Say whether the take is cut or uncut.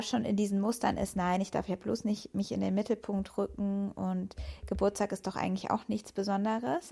uncut